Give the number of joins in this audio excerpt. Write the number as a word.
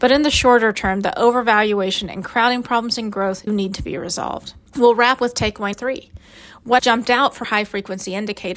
six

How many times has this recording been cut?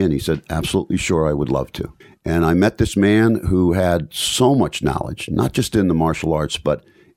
one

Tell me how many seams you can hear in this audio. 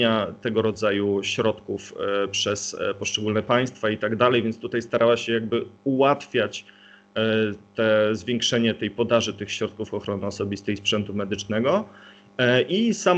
one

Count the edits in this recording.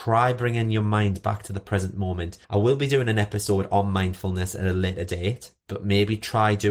one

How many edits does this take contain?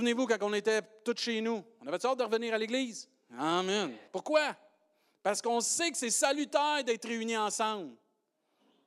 one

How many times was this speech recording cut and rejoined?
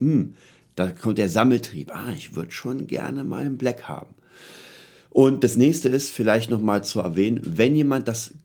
zero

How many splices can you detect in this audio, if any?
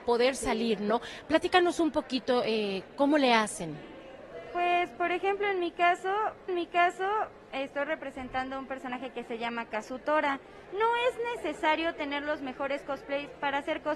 two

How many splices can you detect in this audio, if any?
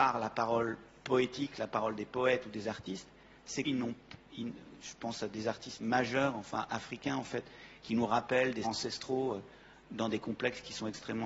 three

